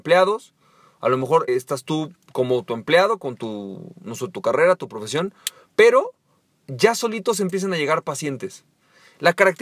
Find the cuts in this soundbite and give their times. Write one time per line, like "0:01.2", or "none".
0:01.5